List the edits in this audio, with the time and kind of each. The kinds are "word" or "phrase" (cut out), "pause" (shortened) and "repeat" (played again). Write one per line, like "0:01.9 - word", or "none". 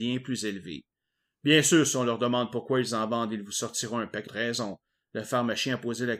0:04.3 - word